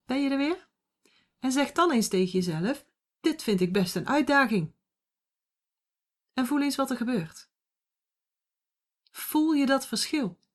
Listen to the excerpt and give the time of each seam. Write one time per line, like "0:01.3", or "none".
none